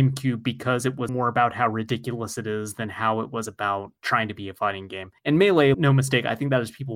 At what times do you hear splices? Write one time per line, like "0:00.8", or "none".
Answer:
0:01.1
0:04.0
0:05.2
0:05.7